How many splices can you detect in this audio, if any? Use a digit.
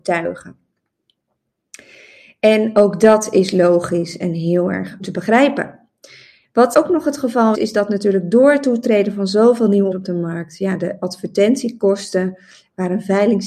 4